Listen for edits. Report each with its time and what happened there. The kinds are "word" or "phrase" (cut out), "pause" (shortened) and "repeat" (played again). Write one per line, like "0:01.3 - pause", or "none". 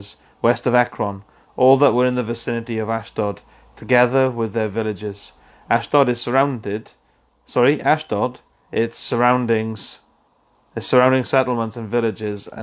none